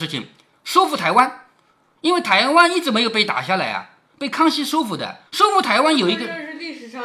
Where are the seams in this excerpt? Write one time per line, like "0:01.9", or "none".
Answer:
0:05.3